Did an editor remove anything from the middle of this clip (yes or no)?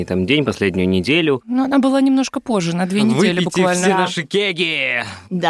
no